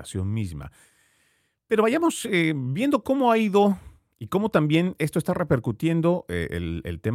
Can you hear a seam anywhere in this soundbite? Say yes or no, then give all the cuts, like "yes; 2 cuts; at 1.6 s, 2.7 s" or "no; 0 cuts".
no; 0 cuts